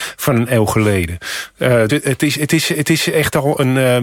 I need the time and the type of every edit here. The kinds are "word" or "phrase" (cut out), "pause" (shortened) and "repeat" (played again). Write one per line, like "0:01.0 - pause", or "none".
0:01.9 - word
0:02.7 - repeat